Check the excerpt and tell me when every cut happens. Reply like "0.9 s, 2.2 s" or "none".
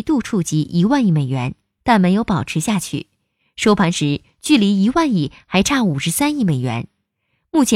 none